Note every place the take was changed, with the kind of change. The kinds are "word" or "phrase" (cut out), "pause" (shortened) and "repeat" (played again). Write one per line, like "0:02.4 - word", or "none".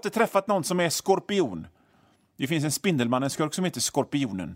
none